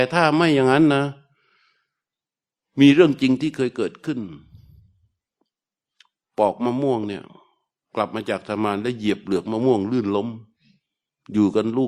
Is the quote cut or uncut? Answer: uncut